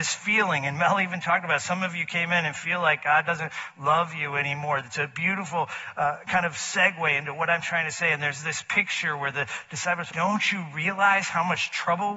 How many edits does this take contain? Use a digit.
1